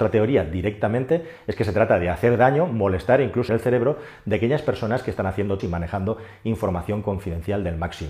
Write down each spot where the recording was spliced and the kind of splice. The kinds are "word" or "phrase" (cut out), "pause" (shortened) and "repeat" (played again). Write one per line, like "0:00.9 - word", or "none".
0:03.5 - word
0:05.6 - phrase